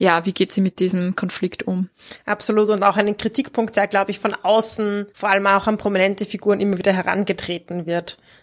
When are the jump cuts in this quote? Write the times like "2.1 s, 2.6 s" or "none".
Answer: 5.1 s